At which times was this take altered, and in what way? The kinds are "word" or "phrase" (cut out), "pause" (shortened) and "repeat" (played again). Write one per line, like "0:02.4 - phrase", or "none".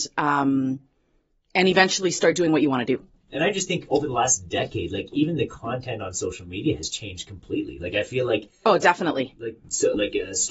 none